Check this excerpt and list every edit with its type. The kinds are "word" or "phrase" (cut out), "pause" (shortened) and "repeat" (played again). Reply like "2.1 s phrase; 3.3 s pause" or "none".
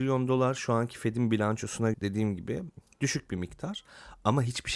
1.9 s word